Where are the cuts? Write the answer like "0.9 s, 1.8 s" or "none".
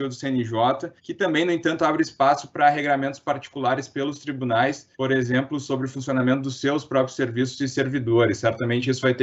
1.0 s, 4.9 s